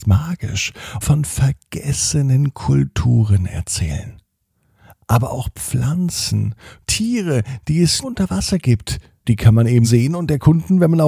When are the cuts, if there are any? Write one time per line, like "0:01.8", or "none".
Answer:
0:01.0
0:06.8
0:08.0
0:09.2
0:09.8